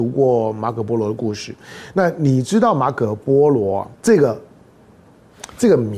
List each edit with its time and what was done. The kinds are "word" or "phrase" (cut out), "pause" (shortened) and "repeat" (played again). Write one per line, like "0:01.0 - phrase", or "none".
0:03.9 - pause